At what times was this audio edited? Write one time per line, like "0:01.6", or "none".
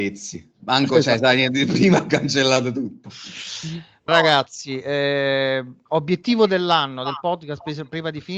0:04.1